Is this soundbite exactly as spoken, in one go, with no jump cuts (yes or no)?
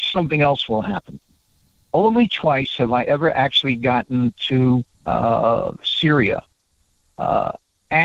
no